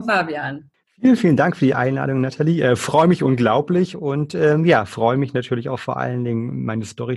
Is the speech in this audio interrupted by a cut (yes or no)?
no